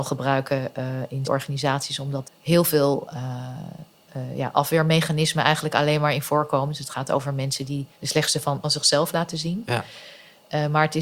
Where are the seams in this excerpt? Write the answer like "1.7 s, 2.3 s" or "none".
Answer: 1.2 s, 2.2 s, 7.9 s, 8.6 s